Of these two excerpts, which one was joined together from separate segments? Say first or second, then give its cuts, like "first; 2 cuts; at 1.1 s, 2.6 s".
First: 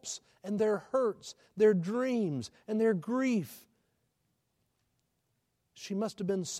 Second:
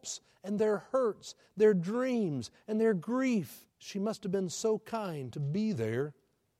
second; 1 cut; at 3.7 s